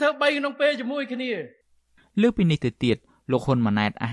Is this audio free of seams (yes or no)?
yes